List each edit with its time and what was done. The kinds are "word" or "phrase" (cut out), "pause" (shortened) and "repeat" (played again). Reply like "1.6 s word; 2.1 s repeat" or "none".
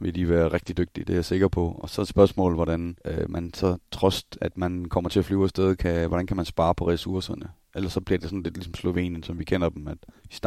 3.0 s pause